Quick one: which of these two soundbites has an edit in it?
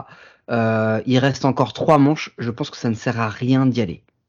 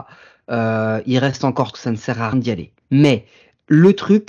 second; 3 cuts; at 1.7 s, 2.3 s, 2.8 s

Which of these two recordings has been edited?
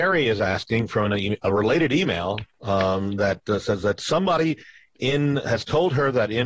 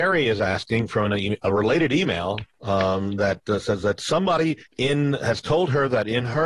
second; 1 cut; at 4.7 s

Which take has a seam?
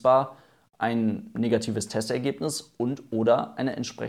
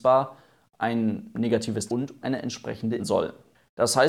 second; 3 cuts; at 1.9 s, 2.2 s, 3.0 s

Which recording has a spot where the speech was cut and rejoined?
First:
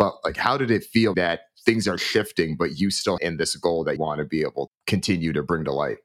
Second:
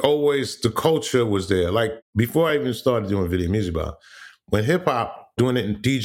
first; 4 cuts; at 1.1 s, 3.2 s, 4.0 s, 4.7 s

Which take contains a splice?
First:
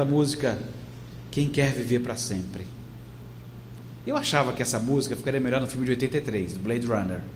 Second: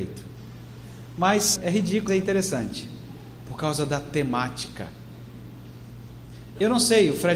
second; 2 cuts; at 1.6 s, 2.1 s

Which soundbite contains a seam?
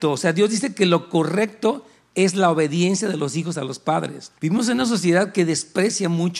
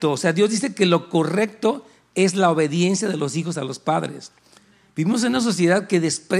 first; 1 cut; at 4.4 s

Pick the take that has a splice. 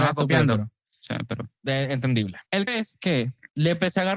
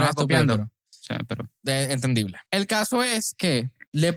first; 1 cut; at 2.7 s

